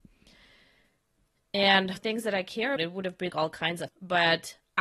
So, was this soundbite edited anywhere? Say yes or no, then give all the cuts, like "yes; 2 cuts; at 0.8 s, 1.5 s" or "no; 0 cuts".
yes; 4 cuts; at 2.0 s, 2.8 s, 3.3 s, 3.9 s